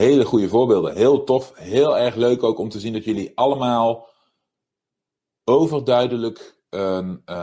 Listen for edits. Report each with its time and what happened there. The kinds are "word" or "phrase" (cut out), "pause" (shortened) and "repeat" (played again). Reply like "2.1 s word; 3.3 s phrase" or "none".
none

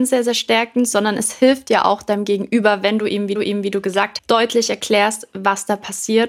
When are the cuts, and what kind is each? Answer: 3.4 s repeat; 4.2 s word

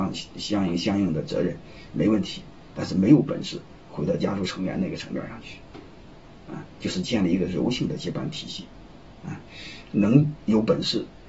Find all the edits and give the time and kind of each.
none

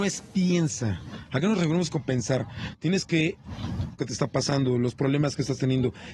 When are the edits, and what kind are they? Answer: 4.0 s phrase

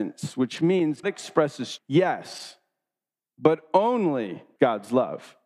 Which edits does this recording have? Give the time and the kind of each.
1.0 s word; 1.8 s word; 4.6 s word

